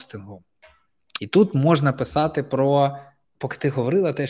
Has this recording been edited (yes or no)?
yes